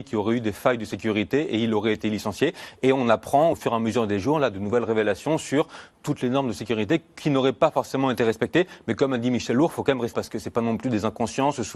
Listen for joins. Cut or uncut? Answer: cut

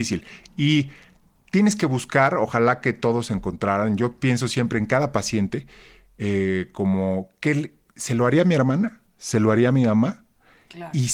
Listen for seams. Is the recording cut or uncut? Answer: uncut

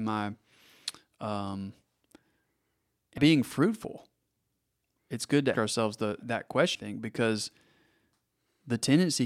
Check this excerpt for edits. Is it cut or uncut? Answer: cut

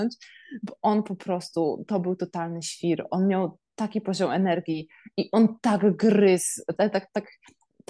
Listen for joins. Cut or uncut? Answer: cut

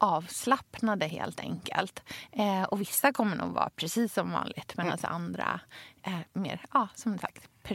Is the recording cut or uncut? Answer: uncut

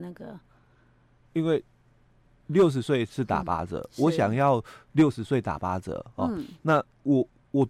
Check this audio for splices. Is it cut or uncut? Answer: uncut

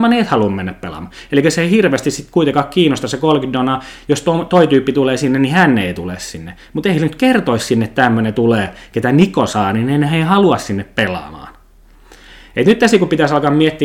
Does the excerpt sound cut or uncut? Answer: uncut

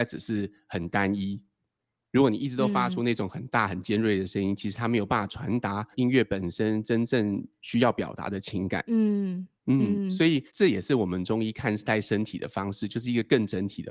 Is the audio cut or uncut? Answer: uncut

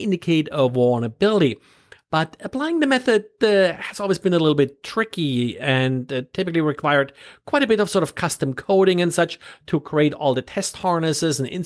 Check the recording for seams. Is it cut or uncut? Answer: uncut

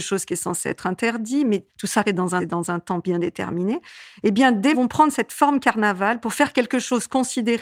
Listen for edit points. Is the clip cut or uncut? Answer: cut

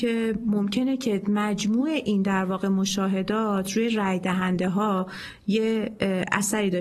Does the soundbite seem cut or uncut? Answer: uncut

